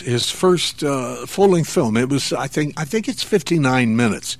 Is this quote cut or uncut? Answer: uncut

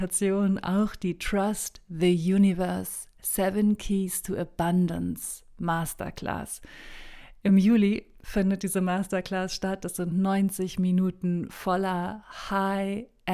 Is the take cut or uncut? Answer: uncut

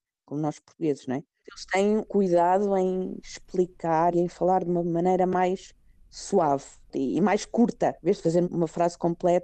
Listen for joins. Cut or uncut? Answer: cut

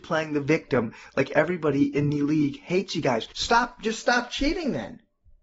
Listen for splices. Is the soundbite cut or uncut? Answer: cut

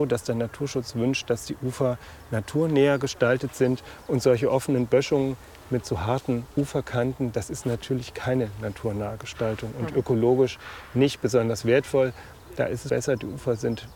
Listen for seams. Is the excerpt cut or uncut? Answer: cut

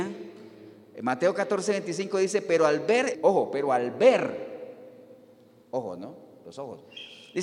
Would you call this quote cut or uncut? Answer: cut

